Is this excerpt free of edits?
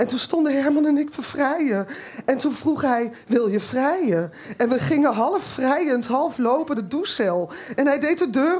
no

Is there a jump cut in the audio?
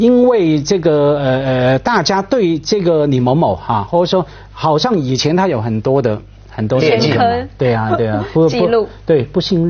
no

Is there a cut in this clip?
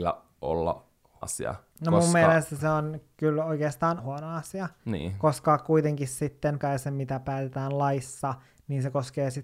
yes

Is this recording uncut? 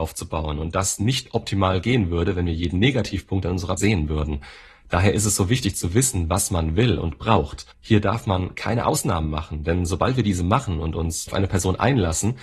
no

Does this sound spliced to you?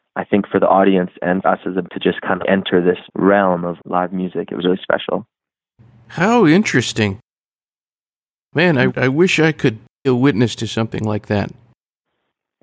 yes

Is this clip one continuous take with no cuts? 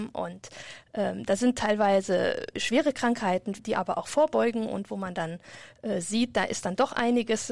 no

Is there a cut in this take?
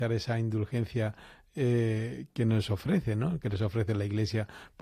no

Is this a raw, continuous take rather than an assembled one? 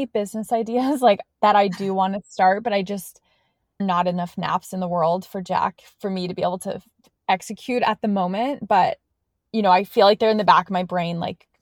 no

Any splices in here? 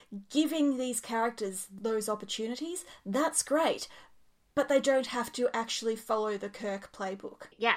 no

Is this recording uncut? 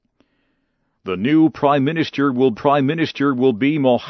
no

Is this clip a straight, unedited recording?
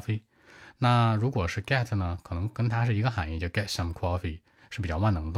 yes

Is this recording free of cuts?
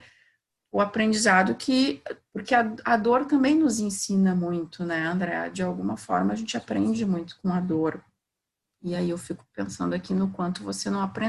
yes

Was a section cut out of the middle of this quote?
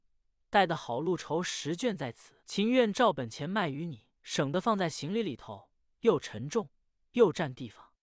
yes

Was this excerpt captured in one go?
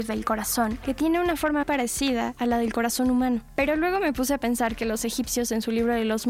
no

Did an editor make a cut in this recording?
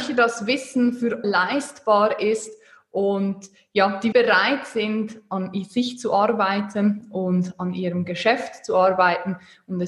yes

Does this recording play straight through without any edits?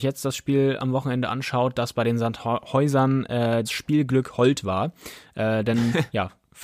no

